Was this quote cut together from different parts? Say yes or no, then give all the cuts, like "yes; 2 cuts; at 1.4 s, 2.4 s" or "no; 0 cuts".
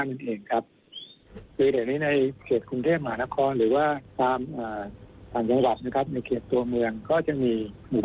yes; 2 cuts; at 1.5 s, 4.1 s